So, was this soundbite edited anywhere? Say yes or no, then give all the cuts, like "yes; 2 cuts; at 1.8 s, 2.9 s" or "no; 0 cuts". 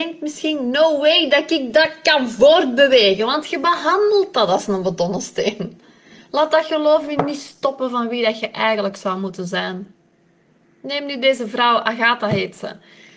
no; 0 cuts